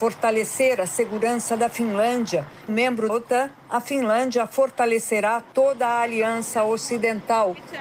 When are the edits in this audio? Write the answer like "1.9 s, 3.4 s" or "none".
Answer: 2.7 s, 3.1 s